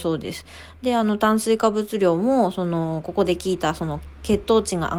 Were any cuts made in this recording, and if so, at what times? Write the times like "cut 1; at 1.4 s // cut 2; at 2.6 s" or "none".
none